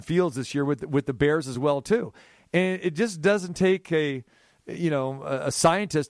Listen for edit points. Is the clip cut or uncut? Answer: uncut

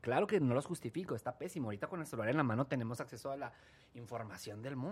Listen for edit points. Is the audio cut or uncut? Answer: uncut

